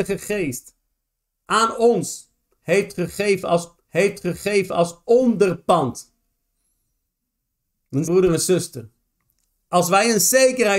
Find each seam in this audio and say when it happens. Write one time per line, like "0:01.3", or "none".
0:03.8
0:08.0